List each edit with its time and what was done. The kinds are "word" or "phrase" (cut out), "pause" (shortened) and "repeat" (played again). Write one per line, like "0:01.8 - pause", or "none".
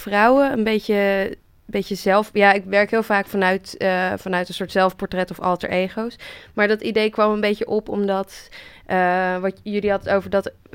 none

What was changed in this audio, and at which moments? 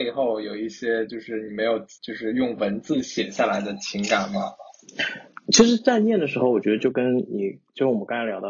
0:02.0 - pause

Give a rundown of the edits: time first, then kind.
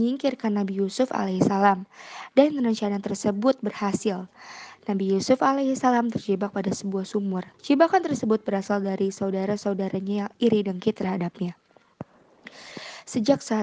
0:07.5 - pause

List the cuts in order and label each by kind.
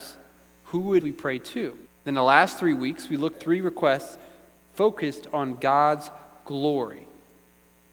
0:01.0 - word
0:01.9 - pause
0:03.3 - word

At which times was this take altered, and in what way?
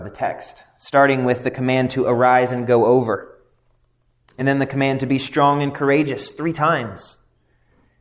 none

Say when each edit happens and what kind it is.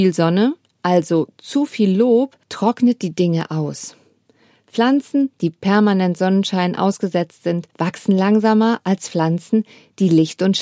0:02.4 - pause
0:07.7 - pause

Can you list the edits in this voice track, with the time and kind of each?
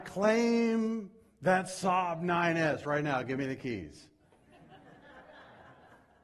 none

